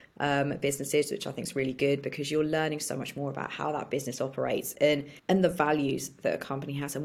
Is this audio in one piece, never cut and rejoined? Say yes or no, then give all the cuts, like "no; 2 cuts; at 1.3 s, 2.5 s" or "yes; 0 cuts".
no; 1 cut; at 5.2 s